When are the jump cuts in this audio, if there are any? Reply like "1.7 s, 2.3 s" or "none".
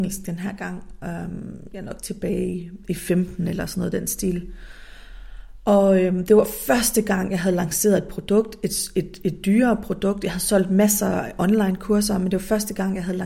none

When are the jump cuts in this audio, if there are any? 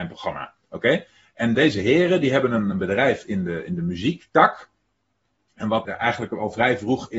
1.5 s, 2.7 s, 5.8 s

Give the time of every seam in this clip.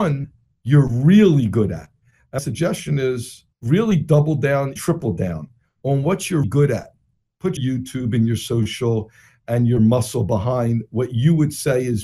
2.4 s, 3.5 s, 4.8 s, 6.4 s, 7.6 s

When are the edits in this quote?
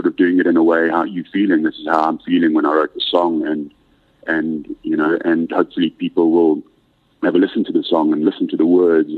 none

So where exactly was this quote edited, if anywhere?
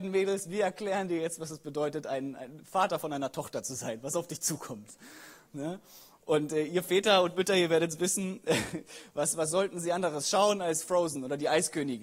none

